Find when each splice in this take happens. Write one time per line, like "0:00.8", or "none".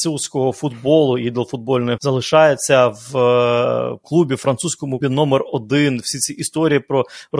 0:02.0
0:04.0
0:05.0

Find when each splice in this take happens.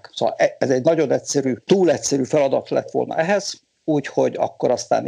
none

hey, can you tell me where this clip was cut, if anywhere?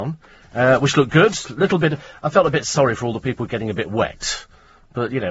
none

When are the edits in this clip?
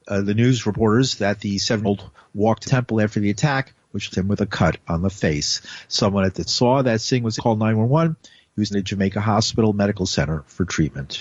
0:01.8
0:02.6
0:04.1
0:06.5
0:07.4
0:08.7

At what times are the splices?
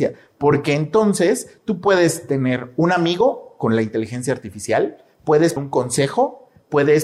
0:05.6

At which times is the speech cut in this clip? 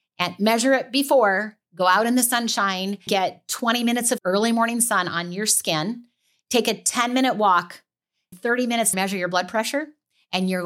0:03.1
0:04.2
0:08.3
0:08.9

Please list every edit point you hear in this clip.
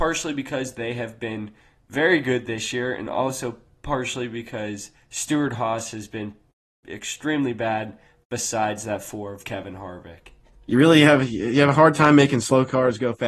none

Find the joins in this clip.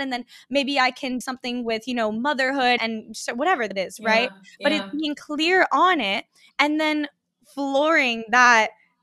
0:01.2
0:02.8
0:03.7

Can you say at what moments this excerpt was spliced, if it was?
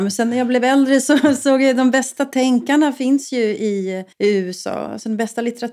0:04.1

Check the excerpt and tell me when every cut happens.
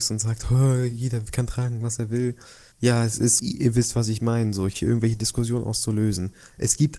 0:02.7
0:03.4
0:04.7

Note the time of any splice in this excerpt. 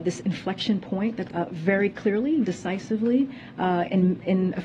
0:01.3
0:02.4

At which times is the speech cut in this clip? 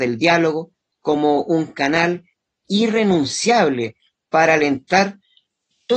none

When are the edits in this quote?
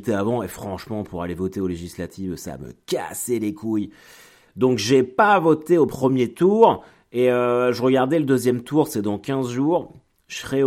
none

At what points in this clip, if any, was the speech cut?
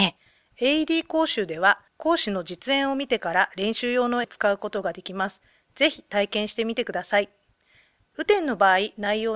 0:01.9
0:04.2

